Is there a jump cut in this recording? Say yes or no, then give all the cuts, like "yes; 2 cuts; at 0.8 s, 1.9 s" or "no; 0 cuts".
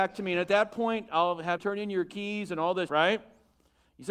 yes; 2 cuts; at 1.6 s, 2.9 s